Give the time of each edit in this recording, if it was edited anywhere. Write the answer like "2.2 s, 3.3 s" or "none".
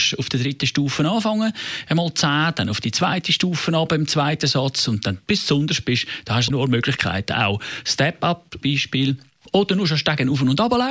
6.5 s, 8.6 s